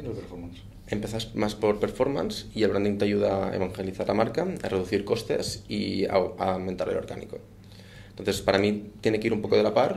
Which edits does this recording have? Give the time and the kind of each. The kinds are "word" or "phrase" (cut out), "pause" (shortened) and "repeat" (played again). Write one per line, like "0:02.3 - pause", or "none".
none